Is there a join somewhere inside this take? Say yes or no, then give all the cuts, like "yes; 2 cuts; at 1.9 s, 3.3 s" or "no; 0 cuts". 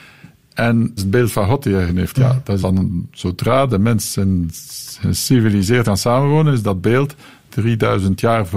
yes; 5 cuts; at 1.0 s, 1.9 s, 2.6 s, 5.8 s, 7.5 s